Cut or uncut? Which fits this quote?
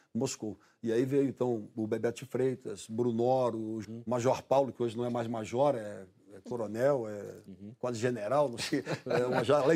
cut